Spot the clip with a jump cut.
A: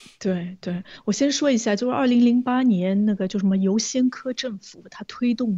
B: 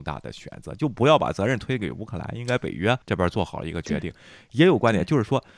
B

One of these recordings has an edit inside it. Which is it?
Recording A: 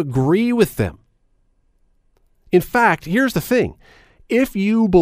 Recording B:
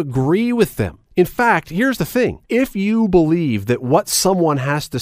B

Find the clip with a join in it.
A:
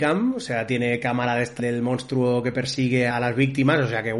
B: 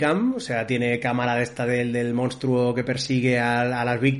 A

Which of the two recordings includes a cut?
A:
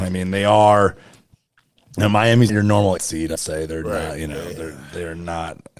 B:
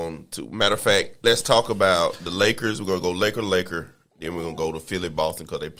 A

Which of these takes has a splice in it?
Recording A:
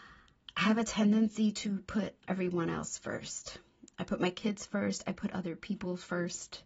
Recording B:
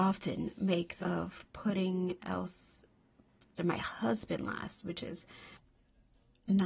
B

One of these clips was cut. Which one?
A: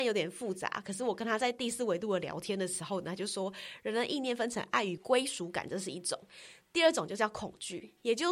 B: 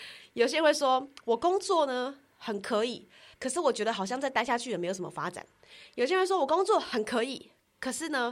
B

